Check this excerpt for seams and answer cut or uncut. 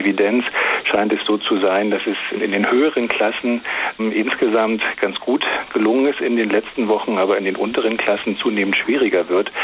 uncut